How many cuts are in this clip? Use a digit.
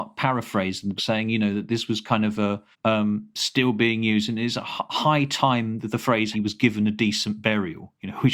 3